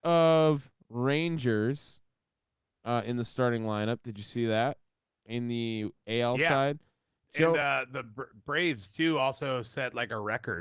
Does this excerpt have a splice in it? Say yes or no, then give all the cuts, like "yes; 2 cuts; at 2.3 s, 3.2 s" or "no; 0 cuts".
no; 0 cuts